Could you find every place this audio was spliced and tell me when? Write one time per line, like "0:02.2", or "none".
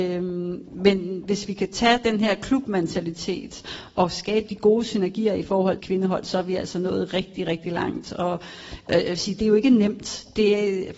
0:05.8